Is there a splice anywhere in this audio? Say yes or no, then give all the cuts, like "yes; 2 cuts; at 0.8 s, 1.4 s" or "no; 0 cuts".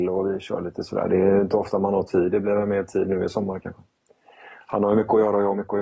no; 0 cuts